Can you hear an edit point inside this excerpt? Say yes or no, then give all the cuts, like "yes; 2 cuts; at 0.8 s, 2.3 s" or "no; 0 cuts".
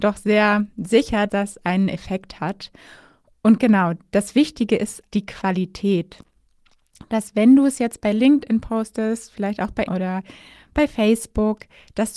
yes; 3 cuts; at 1.3 s, 5.1 s, 9.9 s